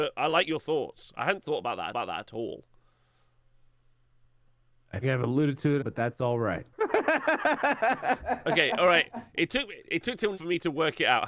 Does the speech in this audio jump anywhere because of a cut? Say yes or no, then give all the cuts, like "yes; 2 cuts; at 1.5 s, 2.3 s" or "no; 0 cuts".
yes; 5 cuts; at 1.9 s, 5.0 s, 5.8 s, 6.7 s, 10.3 s